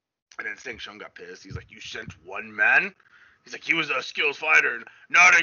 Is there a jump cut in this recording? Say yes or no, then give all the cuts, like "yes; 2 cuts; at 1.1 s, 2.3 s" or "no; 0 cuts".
no; 0 cuts